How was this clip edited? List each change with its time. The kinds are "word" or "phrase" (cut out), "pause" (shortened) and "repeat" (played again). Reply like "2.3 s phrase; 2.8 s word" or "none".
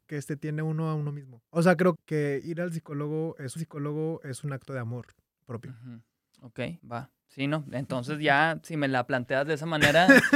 1.5 s pause; 2.0 s word; 3.6 s repeat; 6.8 s pause

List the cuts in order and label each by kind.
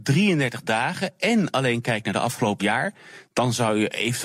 2.6 s word

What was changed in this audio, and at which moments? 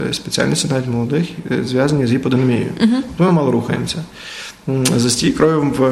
none

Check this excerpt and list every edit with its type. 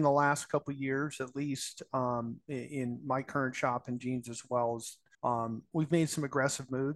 5.1 s pause

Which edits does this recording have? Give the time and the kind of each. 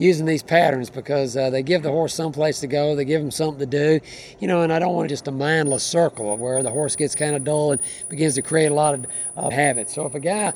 5.1 s phrase; 9.5 s word

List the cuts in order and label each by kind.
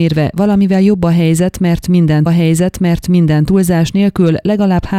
2.3 s repeat

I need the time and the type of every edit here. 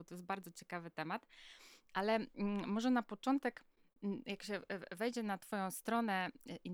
none

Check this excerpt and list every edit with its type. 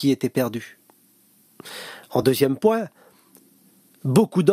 none

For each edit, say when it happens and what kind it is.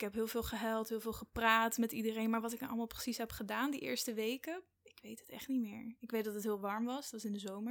none

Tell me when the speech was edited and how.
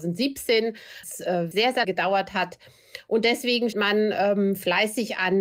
1.0 s word; 1.5 s word; 1.8 s word; 3.7 s word

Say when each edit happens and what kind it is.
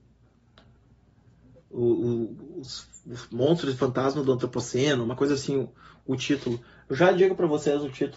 none

